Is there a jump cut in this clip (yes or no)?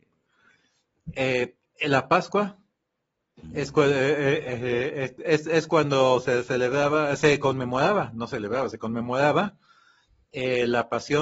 no